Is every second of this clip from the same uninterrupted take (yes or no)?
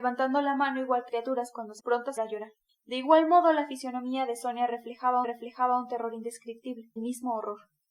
no